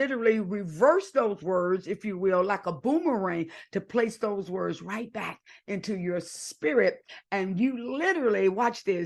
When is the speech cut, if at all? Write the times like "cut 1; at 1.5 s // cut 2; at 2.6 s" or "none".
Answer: none